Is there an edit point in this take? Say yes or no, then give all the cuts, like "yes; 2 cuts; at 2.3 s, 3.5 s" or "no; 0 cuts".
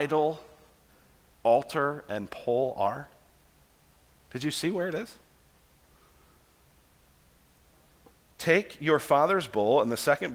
no; 0 cuts